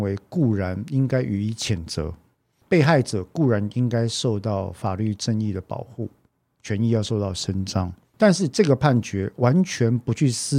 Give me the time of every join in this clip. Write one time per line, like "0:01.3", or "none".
none